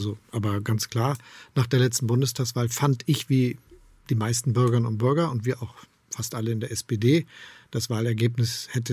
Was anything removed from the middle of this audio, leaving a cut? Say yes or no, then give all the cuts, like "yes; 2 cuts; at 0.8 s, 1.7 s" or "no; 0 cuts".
no; 0 cuts